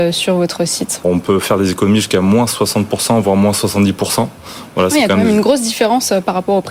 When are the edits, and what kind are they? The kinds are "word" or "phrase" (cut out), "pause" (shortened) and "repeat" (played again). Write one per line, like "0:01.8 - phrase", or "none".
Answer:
0:01.0 - word